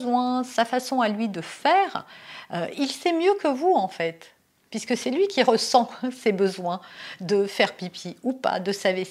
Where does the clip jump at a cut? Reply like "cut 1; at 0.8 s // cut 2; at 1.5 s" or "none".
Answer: none